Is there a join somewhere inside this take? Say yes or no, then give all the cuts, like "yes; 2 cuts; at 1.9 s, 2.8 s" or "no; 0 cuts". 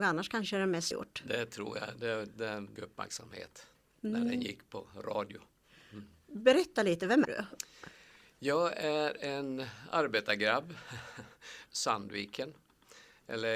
yes; 4 cuts; at 0.9 s, 2.8 s, 7.2 s, 11.7 s